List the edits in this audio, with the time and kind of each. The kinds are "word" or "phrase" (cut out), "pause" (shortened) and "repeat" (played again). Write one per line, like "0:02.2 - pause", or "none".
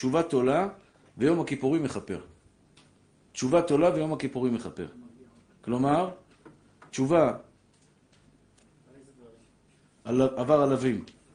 none